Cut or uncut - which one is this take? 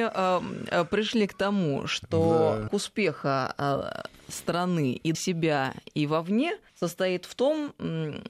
cut